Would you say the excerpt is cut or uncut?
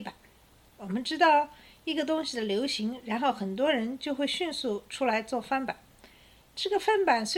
uncut